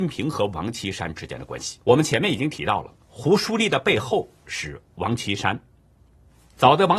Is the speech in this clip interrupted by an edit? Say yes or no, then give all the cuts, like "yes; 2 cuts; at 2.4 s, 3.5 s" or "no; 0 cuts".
yes; 2 cuts; at 1.8 s, 3.0 s